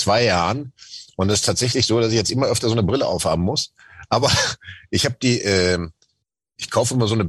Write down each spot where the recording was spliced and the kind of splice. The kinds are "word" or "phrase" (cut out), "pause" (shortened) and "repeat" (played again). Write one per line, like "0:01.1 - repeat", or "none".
none